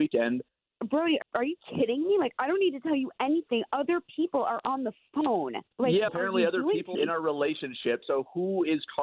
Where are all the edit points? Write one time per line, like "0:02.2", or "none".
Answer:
0:01.2
0:05.7
0:06.1
0:06.9